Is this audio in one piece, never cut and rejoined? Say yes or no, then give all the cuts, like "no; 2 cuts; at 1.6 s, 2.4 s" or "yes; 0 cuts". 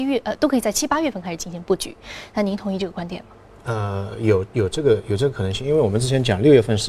yes; 0 cuts